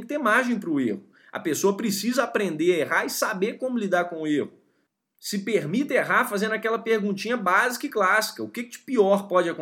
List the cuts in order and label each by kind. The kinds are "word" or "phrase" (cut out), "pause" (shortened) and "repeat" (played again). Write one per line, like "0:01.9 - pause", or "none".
none